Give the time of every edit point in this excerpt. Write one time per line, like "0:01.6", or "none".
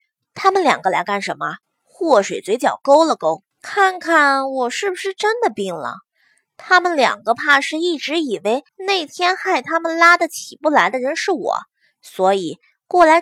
0:01.6
0:03.5
0:08.7